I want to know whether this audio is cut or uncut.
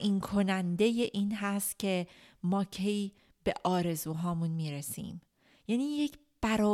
uncut